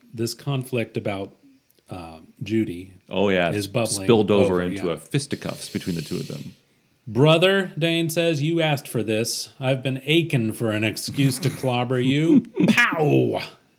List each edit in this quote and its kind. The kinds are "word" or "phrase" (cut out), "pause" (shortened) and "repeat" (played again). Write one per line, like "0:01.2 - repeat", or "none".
none